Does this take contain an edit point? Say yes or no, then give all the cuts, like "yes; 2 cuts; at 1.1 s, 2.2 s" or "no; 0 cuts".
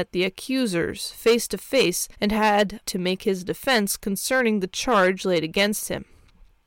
yes; 2 cuts; at 2.1 s, 2.8 s